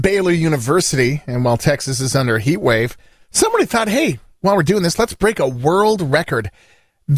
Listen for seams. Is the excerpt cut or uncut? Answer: uncut